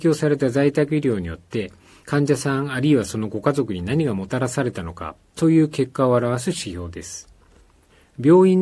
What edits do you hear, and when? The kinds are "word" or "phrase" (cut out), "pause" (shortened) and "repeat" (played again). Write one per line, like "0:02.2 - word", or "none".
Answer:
none

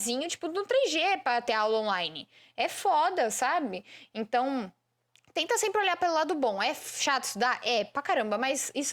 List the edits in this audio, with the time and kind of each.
none

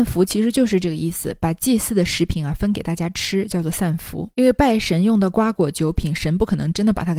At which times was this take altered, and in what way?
0:04.3 - pause

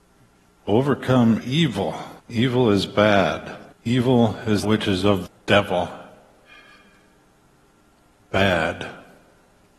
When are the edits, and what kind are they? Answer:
0:01.4 - word
0:02.2 - pause
0:03.7 - pause
0:04.6 - word
0:05.3 - phrase

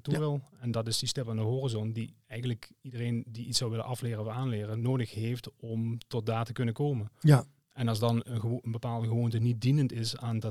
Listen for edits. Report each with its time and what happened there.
0:08.2 - word

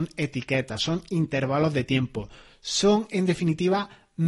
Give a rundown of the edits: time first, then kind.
none

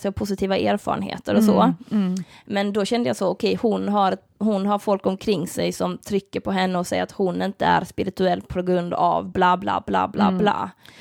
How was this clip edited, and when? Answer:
none

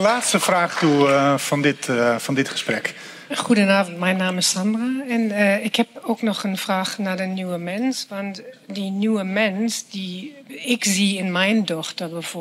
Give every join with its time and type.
0:10.4 - pause

